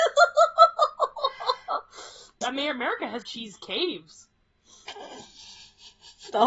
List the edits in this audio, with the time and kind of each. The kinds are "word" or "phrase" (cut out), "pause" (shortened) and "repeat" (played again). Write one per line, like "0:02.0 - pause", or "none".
0:02.4 - word
0:03.2 - word

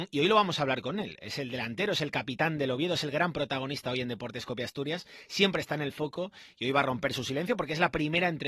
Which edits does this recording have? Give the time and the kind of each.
none

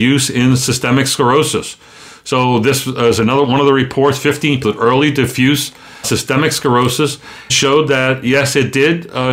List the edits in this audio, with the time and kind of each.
0:04.6 - word
0:06.0 - word
0:07.5 - word

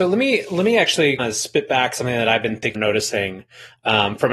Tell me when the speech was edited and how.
0:01.2 - word
0:02.7 - phrase

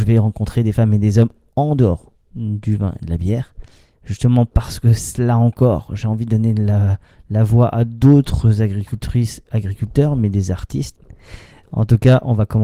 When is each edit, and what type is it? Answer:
none

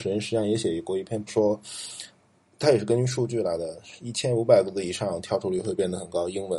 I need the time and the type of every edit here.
0:01.3 - word

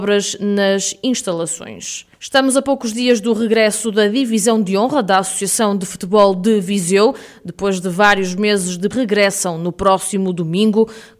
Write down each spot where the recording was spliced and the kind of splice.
0:02.1 - pause
0:08.9 - phrase

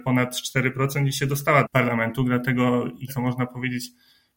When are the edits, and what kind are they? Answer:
0:01.6 - word
0:03.1 - word

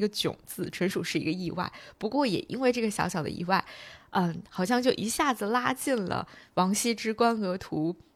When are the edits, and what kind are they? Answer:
none

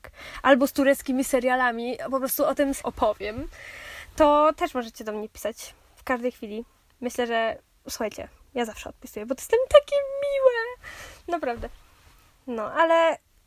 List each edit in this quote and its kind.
0:02.8 - word
0:07.8 - word

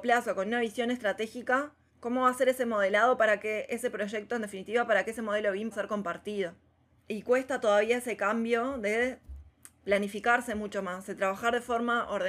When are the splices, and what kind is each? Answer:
0:05.7 - word

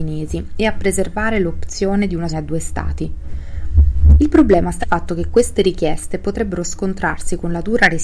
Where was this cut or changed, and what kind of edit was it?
0:02.3 - word
0:04.8 - word

